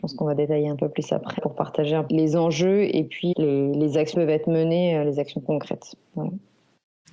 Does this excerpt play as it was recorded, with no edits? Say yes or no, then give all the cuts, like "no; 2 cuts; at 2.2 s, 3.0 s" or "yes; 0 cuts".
no; 4 cuts; at 1.4 s, 2.1 s, 3.3 s, 4.1 s